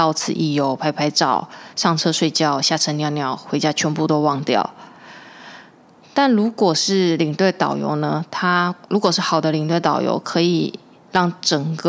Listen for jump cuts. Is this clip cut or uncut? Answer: cut